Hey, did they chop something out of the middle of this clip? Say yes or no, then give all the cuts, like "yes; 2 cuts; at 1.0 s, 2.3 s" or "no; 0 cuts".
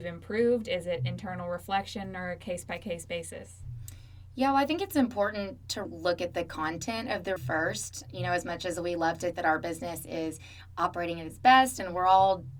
yes; 3 cuts; at 5.8 s, 7.4 s, 9.3 s